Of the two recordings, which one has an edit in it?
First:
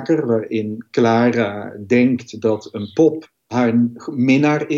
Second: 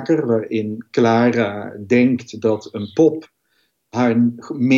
first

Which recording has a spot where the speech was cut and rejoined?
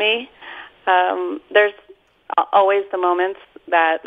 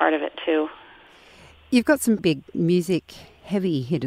second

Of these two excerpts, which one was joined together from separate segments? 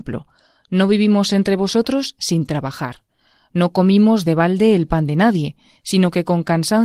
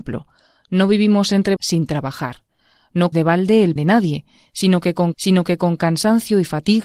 second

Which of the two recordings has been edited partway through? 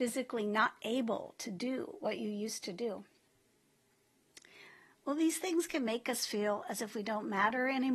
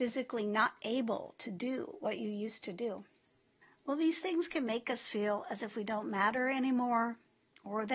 second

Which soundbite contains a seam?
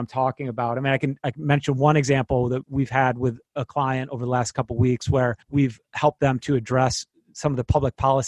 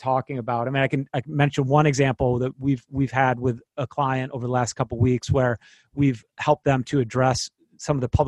first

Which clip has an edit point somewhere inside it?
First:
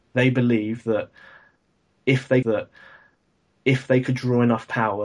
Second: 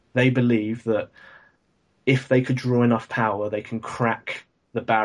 first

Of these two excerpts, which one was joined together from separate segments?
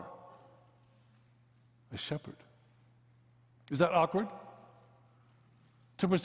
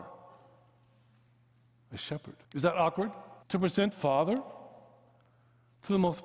second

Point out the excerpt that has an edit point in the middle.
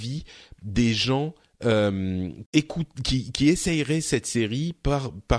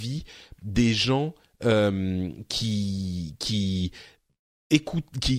first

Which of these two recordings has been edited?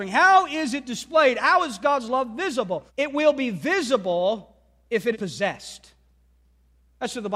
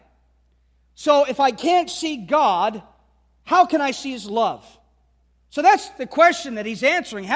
first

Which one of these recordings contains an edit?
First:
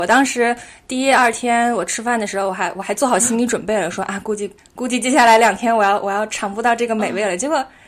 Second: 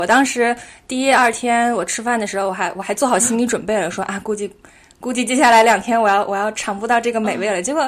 first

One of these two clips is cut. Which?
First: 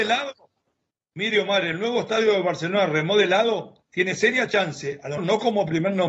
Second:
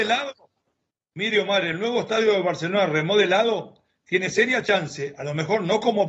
first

